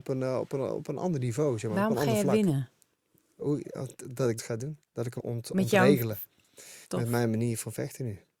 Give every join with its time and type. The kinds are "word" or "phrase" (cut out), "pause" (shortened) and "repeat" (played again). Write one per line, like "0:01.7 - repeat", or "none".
0:04.4 - word
0:04.8 - pause
0:05.2 - word
0:06.8 - pause